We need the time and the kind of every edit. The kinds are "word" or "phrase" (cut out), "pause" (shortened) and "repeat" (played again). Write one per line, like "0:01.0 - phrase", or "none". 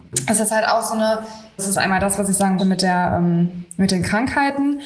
0:01.6 - word
0:02.6 - word